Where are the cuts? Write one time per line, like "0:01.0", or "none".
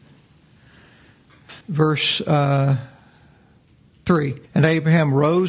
0:01.6
0:04.5